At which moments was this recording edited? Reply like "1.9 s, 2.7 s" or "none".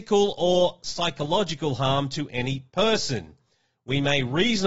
none